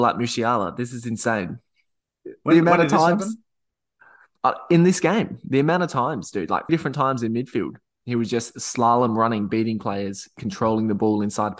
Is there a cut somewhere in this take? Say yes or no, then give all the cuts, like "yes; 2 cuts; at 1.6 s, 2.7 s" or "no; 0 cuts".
yes; 1 cut; at 6.7 s